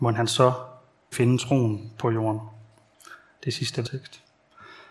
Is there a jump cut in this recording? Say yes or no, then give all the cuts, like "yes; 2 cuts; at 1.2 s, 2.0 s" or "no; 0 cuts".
yes; 2 cuts; at 1.1 s, 3.8 s